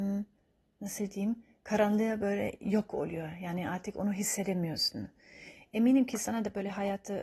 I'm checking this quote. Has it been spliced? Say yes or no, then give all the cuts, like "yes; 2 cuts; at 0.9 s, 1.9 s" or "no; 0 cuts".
no; 0 cuts